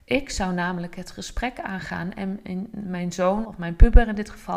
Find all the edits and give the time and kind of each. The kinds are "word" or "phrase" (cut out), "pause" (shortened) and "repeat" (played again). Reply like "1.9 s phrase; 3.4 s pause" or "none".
3.4 s phrase